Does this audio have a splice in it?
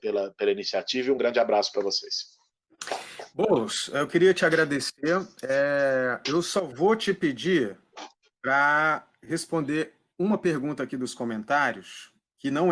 no; 0 cuts

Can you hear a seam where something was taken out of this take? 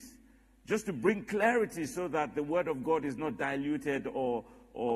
no; 0 cuts

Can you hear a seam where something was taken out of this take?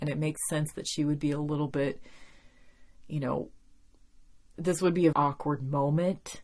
yes; 1 cut; at 5.1 s

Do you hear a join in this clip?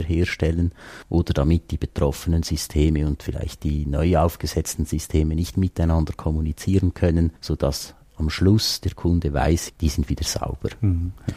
yes; 3 cuts; at 1.0 s, 7.4 s, 9.7 s

